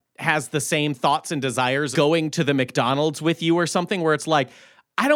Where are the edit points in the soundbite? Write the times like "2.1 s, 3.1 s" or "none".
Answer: 1.9 s